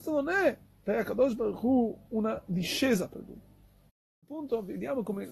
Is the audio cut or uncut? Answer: uncut